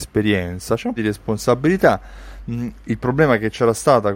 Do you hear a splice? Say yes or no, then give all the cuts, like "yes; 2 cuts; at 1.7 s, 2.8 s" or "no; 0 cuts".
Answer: yes; 1 cut; at 1.0 s